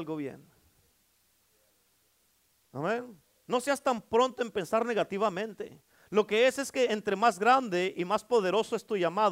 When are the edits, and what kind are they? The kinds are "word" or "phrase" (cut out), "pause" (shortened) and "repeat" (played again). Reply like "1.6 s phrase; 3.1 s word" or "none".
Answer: none